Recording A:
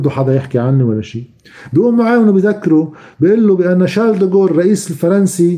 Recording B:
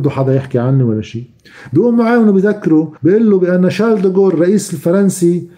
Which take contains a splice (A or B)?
B